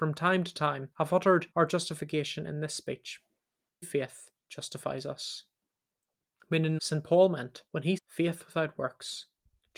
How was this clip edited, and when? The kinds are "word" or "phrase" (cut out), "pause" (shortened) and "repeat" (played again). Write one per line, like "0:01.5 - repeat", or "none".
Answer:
0:00.9 - pause
0:01.5 - pause
0:03.8 - word
0:04.4 - pause
0:06.8 - phrase
0:07.7 - pause
0:08.0 - word